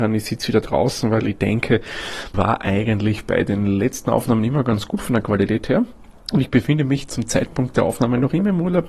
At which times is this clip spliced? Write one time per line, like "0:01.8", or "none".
0:02.3
0:06.2